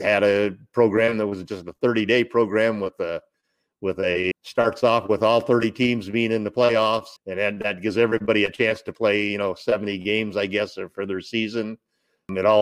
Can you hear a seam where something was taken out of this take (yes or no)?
yes